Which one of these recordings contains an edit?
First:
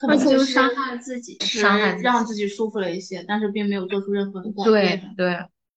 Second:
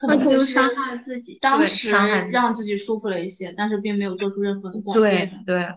first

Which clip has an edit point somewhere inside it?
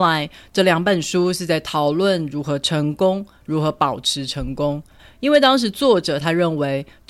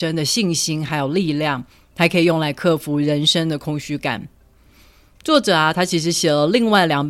first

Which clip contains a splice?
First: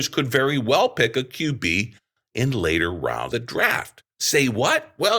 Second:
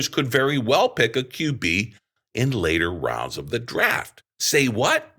first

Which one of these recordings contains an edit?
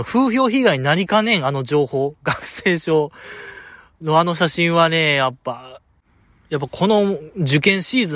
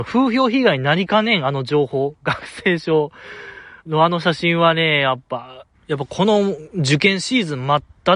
second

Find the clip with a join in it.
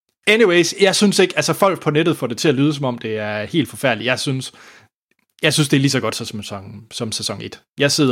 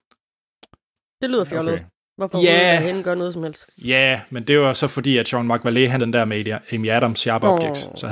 second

